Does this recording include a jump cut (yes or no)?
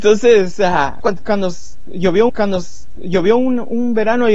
yes